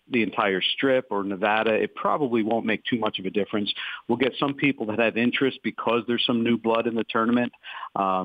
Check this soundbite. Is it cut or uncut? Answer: uncut